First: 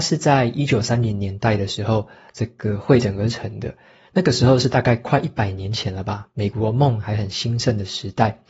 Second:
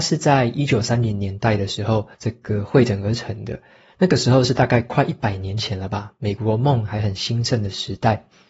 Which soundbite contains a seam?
second; 1 cut; at 2.1 s

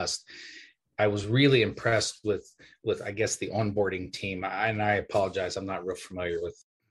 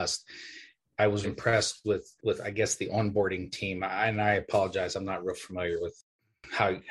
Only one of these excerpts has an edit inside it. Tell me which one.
second; 2 cuts; at 1.2 s, 2.2 s

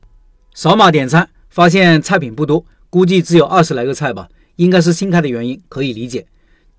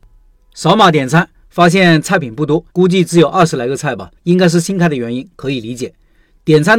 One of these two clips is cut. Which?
second; 2 cuts; at 2.7 s, 4.2 s

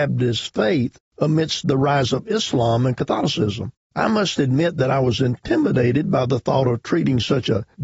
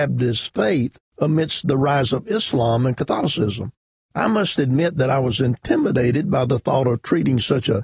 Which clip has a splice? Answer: first; 1 cut; at 3.8 s

